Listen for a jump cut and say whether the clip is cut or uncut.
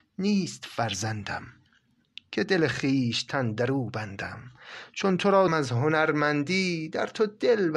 cut